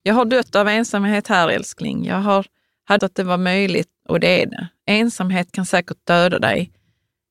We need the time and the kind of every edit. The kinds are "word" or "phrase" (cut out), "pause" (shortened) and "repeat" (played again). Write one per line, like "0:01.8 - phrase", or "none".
0:03.0 - word
0:04.0 - word